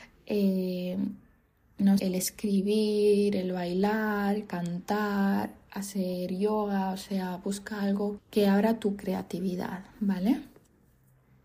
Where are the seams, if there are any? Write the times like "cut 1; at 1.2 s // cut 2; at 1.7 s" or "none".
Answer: cut 1; at 2.0 s // cut 2; at 8.2 s